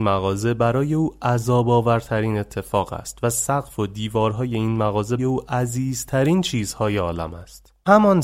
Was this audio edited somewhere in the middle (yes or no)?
yes